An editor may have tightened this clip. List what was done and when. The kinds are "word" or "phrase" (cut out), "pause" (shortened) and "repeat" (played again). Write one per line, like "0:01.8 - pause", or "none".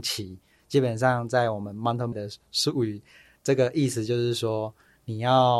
0:02.1 - word